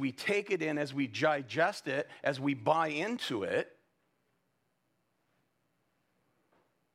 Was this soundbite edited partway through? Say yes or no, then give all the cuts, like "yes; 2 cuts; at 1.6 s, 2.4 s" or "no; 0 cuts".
no; 0 cuts